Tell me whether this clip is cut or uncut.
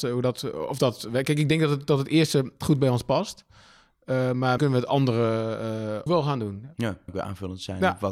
cut